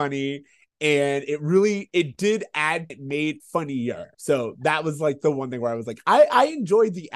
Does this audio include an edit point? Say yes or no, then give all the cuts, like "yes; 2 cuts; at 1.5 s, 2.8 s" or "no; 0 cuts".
yes; 3 cuts; at 2.9 s, 3.4 s, 4.1 s